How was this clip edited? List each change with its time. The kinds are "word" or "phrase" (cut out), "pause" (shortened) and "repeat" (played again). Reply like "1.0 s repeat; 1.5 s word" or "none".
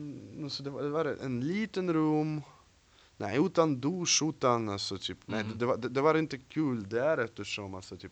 none